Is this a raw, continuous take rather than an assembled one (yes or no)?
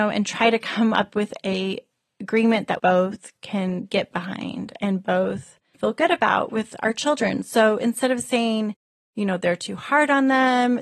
no